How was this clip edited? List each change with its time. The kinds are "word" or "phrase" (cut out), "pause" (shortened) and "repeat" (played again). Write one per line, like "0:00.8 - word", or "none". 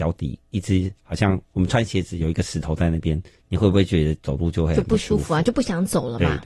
0:03.3 - pause